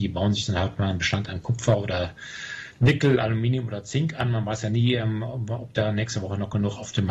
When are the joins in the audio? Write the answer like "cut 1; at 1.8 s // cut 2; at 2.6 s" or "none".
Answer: none